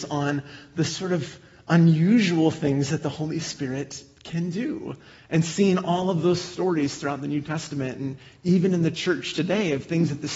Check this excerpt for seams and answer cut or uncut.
uncut